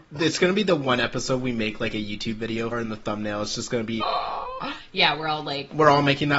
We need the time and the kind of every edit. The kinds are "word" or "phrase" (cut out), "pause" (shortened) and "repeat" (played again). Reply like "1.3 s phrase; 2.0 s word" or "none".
2.7 s word; 4.0 s phrase